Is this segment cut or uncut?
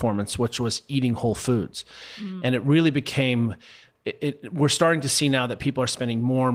uncut